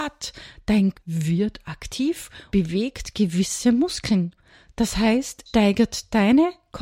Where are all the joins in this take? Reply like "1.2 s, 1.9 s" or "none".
0.9 s, 2.5 s, 5.5 s